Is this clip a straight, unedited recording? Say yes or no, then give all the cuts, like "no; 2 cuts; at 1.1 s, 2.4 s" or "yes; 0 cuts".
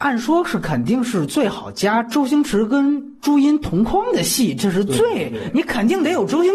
yes; 0 cuts